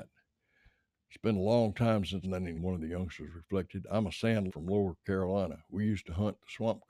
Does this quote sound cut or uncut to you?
cut